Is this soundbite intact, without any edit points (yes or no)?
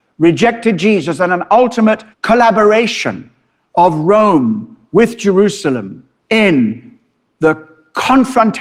no